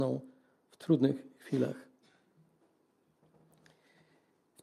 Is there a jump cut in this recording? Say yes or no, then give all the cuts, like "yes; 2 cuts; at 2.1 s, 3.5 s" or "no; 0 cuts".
no; 0 cuts